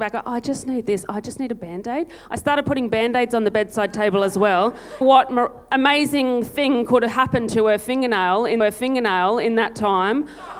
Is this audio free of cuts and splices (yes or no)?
no